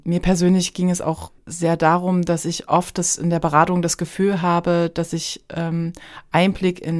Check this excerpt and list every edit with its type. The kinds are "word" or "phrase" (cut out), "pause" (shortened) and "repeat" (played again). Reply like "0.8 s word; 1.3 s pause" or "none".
1.4 s pause

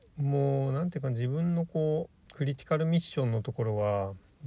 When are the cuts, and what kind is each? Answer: 2.3 s pause

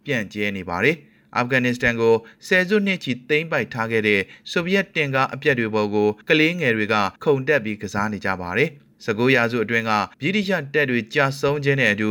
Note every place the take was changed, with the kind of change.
6.2 s pause; 7.2 s pause; 8.9 s pause; 10.1 s pause

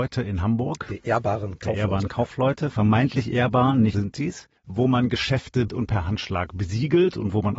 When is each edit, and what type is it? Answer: 3.9 s word; 4.6 s pause; 5.7 s word

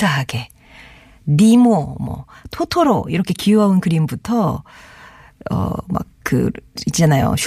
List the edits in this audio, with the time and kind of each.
none

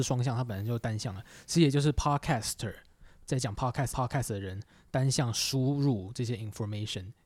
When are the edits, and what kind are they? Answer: 3.9 s repeat

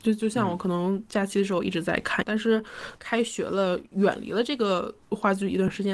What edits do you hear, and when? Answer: 2.2 s phrase

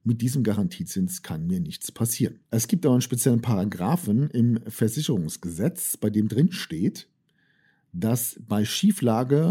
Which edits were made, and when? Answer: 2.4 s pause

